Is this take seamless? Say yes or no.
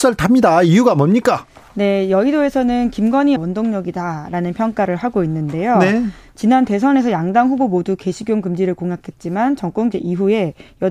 no